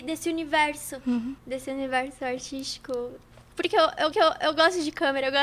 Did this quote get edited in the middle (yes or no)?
yes